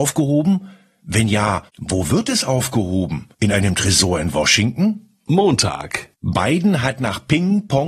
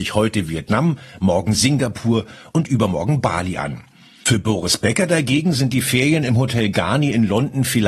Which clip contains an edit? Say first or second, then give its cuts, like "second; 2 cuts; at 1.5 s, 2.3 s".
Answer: first; 1 cut; at 3.3 s